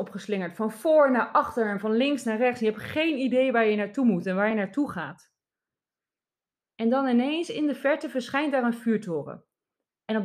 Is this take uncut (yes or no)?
yes